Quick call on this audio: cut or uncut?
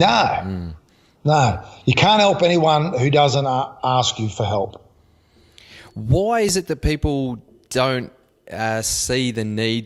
uncut